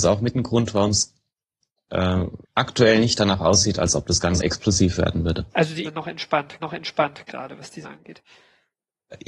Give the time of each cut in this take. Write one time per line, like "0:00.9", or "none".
0:02.4
0:04.4
0:05.5
0:05.8
0:06.6
0:07.8